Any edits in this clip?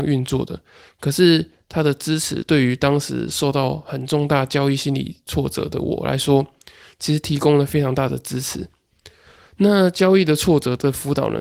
no; 0 cuts

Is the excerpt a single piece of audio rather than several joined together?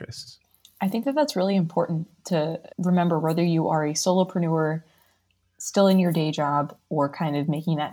no; 1 cut; at 2.7 s

